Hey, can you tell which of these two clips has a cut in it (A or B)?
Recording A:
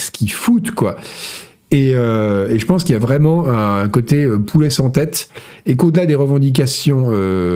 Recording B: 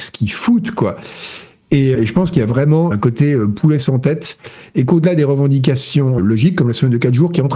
B